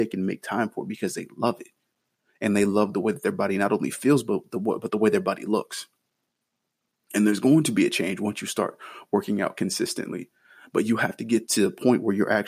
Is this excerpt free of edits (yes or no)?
yes